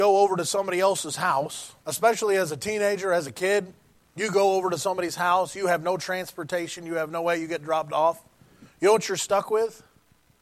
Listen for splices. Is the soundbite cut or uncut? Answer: cut